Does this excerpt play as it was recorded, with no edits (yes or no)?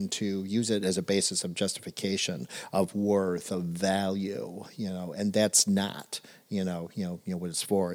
yes